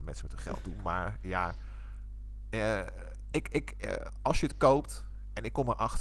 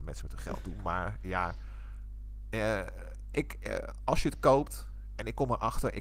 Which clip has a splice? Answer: second; 1 cut; at 3.3 s

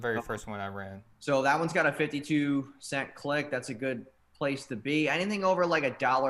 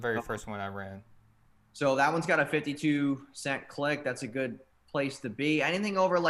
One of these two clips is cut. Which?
first; 1 cut; at 1.1 s

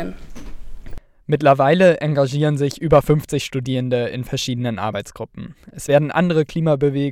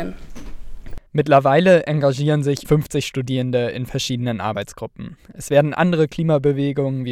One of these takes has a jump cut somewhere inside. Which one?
second; 2 cuts; at 1.1 s, 2.6 s

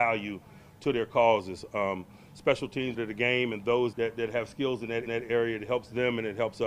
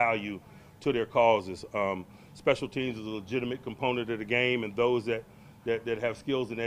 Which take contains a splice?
first; 3 cuts; at 2.9 s, 3.9 s, 5.1 s

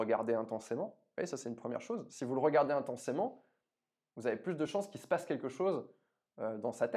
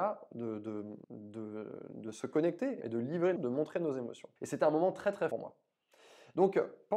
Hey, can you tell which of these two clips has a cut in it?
second; 5 cuts; at 1.0 s, 2.8 s, 3.4 s, 4.4 s, 5.3 s

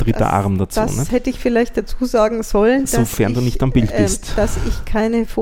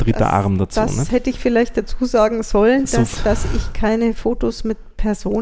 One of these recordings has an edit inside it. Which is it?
second; 1 cut; at 3.2 s

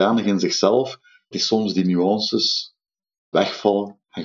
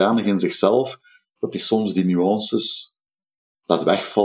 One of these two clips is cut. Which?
first; 2 cuts; at 1.3 s, 3.3 s

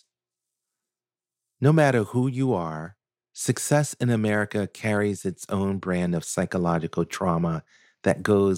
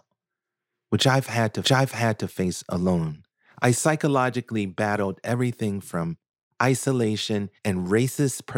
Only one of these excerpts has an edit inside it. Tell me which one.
second; 3 cuts; at 1.6 s, 3.3 s, 7.6 s

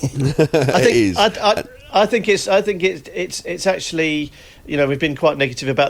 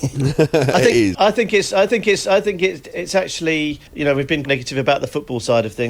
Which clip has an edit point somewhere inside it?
second; 5 cuts; at 1.1 s, 1.9 s, 2.9 s, 3.9 s, 4.4 s

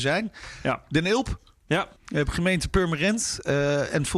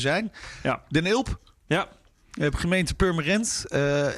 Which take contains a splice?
first; 1 cut; at 2.0 s

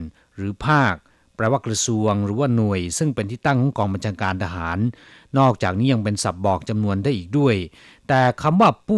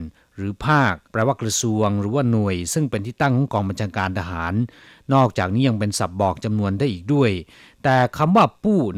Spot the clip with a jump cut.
second; 1 cut; at 1.1 s

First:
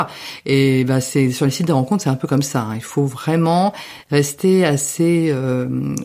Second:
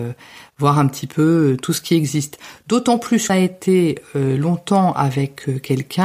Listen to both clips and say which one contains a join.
second; 1 cut; at 3.3 s

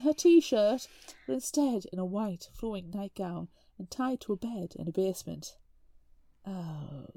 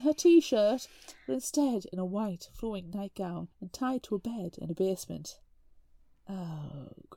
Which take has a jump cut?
second; 1 cut; at 3.5 s

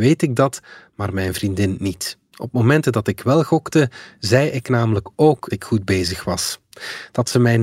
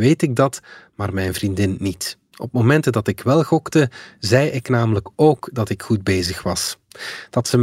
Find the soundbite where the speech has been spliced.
first; 1 cut; at 5.5 s

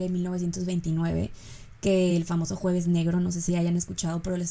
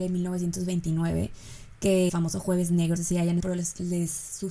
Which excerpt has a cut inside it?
second; 3 cuts; at 2.1 s, 3.0 s, 3.4 s

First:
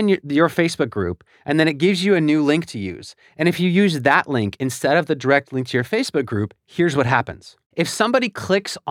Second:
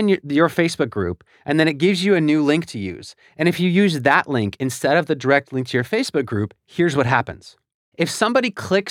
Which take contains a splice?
first; 1 cut; at 7.6 s

